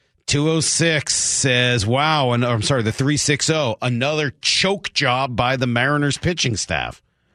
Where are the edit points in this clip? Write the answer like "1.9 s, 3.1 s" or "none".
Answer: none